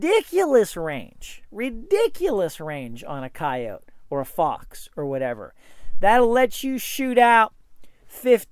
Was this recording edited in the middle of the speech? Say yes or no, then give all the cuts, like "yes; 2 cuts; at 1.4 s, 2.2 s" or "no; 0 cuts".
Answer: no; 0 cuts